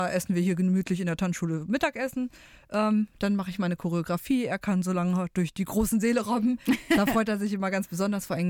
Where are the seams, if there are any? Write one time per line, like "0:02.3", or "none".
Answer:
none